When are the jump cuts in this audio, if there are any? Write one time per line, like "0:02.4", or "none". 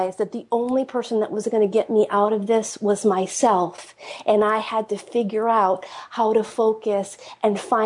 none